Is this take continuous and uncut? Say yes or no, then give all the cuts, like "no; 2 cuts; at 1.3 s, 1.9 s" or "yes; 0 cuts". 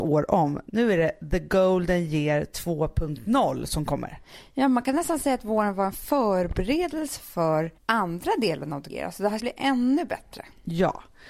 no; 3 cuts; at 7.8 s, 8.9 s, 9.4 s